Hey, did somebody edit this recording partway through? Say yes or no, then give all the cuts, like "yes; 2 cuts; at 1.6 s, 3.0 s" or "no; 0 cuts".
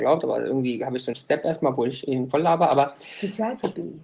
yes; 1 cut; at 1.1 s